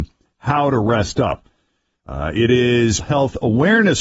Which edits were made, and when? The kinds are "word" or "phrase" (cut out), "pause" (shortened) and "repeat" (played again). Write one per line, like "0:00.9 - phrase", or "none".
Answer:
0:03.0 - word